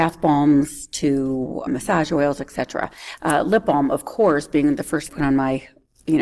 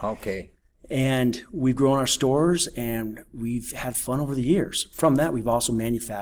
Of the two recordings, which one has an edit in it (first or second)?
first